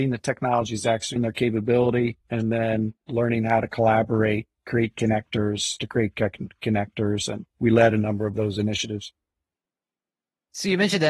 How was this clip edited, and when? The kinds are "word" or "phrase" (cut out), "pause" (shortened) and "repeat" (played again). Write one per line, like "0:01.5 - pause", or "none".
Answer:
0:01.2 - word
0:02.2 - pause
0:04.5 - pause
0:05.8 - phrase
0:07.5 - pause